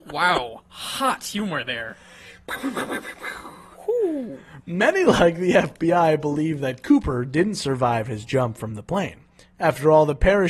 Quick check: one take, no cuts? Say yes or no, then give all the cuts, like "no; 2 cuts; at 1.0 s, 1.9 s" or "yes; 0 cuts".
yes; 0 cuts